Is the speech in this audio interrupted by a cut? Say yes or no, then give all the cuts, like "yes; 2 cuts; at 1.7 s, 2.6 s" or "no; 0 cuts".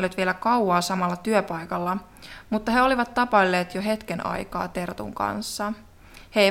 no; 0 cuts